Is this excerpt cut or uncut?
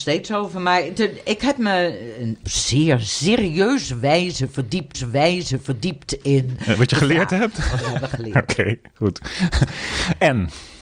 cut